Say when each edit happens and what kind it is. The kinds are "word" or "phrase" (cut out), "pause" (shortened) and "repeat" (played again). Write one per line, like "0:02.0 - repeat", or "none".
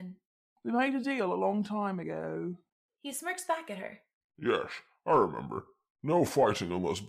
none